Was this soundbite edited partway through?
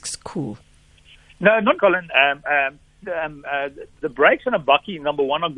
yes; 3 cuts; at 1.7 s, 3.0 s, 4.0 s

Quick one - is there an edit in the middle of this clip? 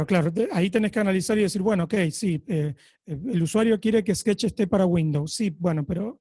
no; 0 cuts

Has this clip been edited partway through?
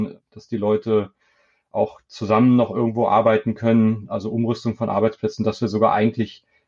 no; 0 cuts

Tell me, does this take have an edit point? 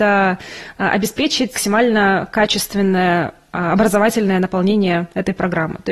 yes; 1 cut; at 1.5 s

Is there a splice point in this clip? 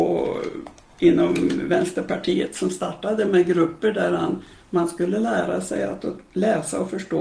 no; 0 cuts

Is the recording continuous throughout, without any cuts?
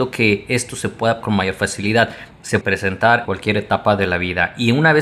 no; 4 cuts; at 1.2 s, 2.3 s, 2.6 s, 3.3 s

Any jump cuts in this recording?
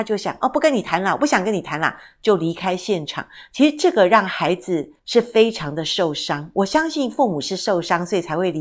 yes; 1 cut; at 5.0 s

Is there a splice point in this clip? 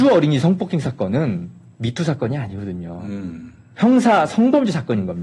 no; 0 cuts

